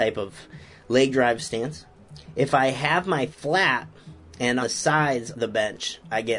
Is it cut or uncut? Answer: cut